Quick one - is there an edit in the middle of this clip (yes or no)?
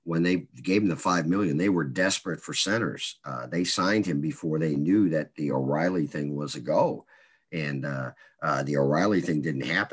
no